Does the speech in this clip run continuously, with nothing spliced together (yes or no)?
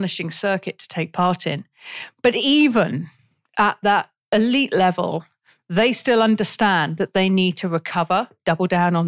yes